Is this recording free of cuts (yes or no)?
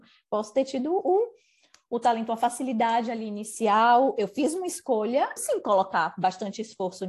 no